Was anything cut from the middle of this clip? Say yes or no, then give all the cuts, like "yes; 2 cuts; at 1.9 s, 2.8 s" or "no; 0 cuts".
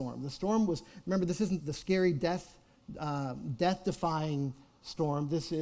yes; 1 cut; at 1.6 s